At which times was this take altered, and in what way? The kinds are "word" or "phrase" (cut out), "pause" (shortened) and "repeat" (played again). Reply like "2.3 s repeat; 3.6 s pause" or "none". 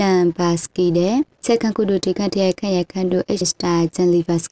3.4 s word